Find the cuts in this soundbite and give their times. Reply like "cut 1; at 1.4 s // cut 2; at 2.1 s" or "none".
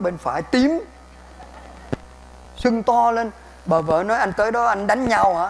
none